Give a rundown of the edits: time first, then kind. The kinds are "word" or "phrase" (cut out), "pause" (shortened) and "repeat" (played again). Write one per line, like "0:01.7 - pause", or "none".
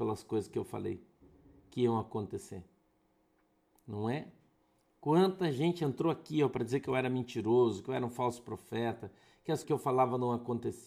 0:09.6 - word